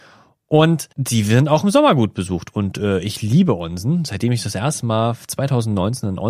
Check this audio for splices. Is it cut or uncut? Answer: cut